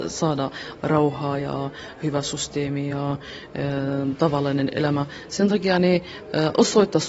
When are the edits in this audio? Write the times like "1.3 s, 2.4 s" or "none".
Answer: none